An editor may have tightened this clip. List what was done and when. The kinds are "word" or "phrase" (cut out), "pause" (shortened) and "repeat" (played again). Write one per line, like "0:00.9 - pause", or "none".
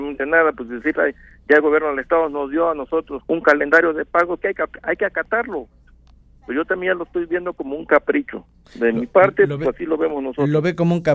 0:00.9 - word
0:03.2 - word
0:04.4 - word